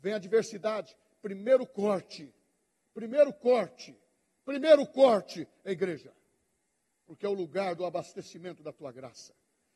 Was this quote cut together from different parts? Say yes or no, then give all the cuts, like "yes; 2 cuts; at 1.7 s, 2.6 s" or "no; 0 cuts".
no; 0 cuts